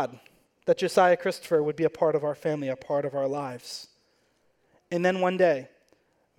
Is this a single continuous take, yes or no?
yes